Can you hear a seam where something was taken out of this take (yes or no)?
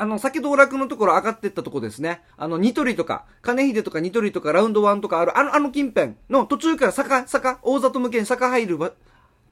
yes